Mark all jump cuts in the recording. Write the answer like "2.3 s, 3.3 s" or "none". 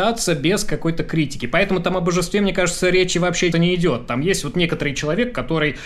3.5 s